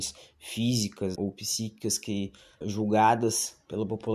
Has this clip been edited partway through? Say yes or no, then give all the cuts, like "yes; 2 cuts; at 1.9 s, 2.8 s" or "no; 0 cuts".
yes; 2 cuts; at 1.1 s, 2.6 s